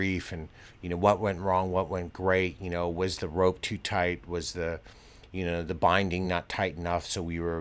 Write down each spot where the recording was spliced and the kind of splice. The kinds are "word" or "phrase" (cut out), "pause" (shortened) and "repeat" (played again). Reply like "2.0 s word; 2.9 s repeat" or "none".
none